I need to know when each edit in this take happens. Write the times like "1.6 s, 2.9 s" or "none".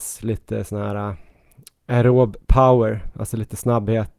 none